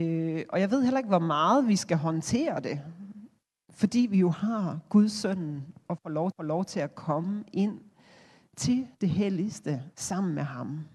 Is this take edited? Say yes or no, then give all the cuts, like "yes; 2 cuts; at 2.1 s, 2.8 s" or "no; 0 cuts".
yes; 3 cuts; at 6.3 s, 8.9 s, 9.9 s